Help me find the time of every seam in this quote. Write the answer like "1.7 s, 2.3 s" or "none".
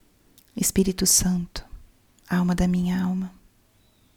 none